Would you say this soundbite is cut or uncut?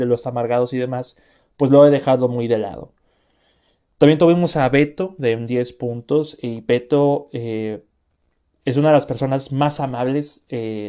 uncut